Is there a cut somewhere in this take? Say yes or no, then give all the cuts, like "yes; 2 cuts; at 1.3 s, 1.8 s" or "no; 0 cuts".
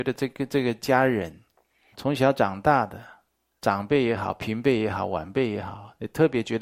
yes; 1 cut; at 1.9 s